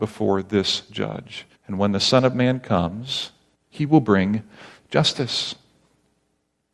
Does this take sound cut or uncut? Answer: cut